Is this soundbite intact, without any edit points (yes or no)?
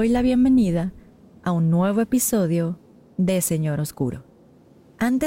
yes